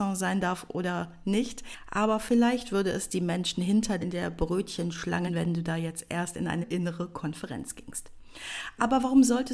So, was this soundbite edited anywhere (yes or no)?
yes